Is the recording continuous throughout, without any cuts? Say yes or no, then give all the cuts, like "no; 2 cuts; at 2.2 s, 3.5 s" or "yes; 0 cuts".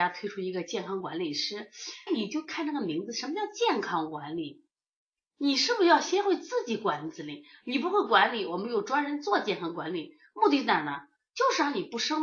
no; 1 cut; at 2.1 s